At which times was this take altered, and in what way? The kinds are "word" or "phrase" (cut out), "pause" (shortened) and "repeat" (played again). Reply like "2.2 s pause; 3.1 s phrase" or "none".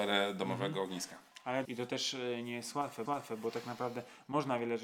1.6 s phrase; 3.1 s repeat